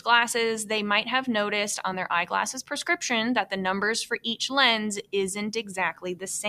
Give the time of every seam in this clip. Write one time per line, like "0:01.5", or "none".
none